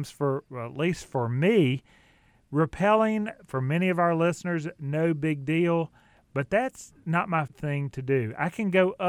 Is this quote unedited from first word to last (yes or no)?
no